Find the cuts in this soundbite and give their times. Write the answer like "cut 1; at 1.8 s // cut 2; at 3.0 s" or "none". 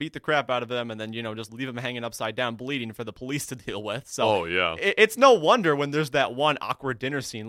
none